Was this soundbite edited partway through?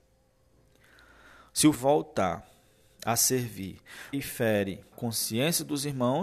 yes; 3 cuts; at 1.7 s, 4.1 s, 4.9 s

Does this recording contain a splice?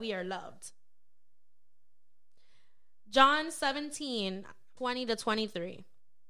yes; 1 cut; at 4.8 s

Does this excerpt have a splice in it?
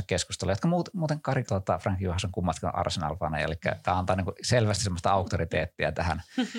yes; 1 cut; at 1.4 s

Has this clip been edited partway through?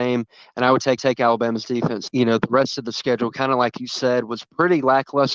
yes; 2 cuts; at 1.0 s, 2.1 s

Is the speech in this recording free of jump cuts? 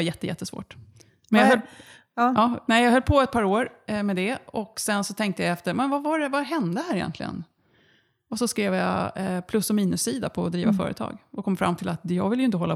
yes; 0 cuts

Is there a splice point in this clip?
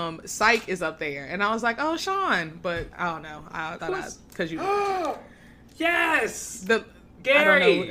yes; 3 cuts; at 2.0 s, 2.9 s, 3.8 s

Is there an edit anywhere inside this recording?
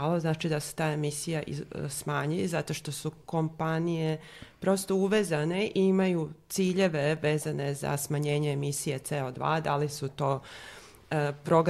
no; 0 cuts

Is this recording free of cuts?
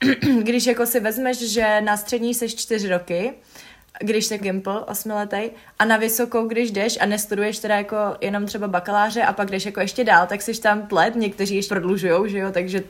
no; 3 cuts; at 4.4 s, 10.9 s, 11.7 s

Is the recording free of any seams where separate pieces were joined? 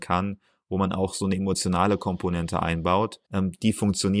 no; 1 cut; at 3.2 s

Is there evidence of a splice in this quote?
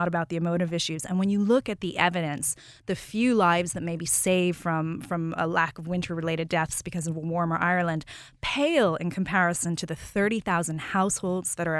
no; 0 cuts

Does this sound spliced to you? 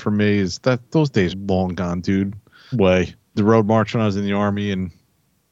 yes; 3 cuts; at 1.3 s, 2.7 s, 3.4 s

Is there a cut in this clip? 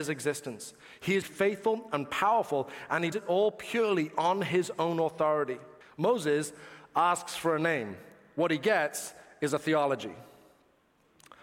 yes; 3 cuts; at 1.2 s, 3.1 s, 5.8 s

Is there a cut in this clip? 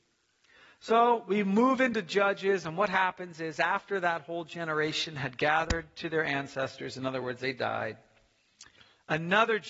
no; 0 cuts

